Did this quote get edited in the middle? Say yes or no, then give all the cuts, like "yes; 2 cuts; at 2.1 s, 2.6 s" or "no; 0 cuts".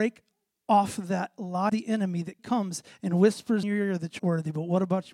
yes; 4 cuts; at 1.7 s, 2.4 s, 3.6 s, 4.2 s